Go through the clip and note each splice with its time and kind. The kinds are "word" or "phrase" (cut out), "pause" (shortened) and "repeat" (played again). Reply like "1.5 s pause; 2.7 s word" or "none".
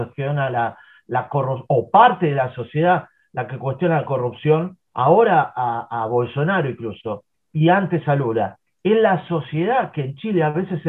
4.9 s pause; 7.3 s pause